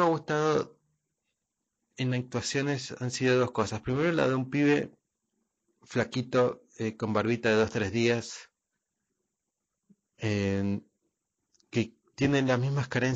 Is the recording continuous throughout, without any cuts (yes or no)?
yes